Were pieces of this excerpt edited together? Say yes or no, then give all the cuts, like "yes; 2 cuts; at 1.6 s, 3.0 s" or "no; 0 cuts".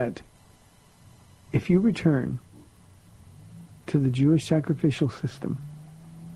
no; 0 cuts